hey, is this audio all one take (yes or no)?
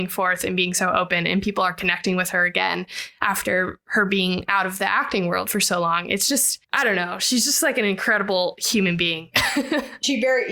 no